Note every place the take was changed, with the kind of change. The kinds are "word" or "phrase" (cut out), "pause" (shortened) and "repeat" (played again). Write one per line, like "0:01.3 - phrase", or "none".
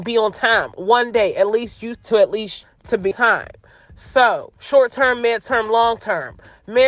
0:01.9 - phrase
0:02.6 - word
0:03.1 - word
0:04.6 - pause